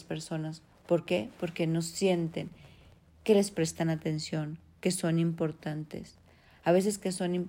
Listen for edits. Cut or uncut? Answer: uncut